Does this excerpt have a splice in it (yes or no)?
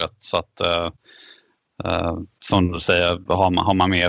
yes